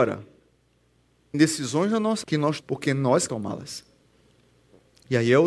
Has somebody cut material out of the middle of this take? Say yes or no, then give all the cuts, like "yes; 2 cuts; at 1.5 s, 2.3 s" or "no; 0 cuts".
yes; 4 cuts; at 1.3 s, 2.2 s, 2.6 s, 3.3 s